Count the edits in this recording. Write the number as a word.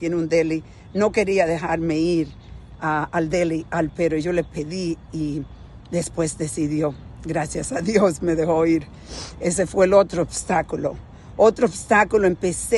one